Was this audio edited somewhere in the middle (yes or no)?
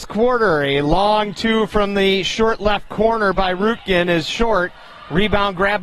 no